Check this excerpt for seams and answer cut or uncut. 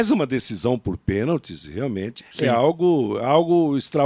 cut